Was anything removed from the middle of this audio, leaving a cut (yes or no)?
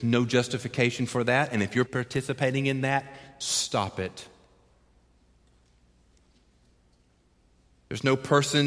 yes